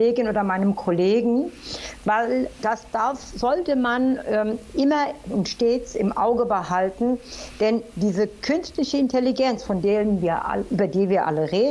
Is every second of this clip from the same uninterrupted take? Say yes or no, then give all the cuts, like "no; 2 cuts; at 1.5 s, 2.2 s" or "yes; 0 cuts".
yes; 0 cuts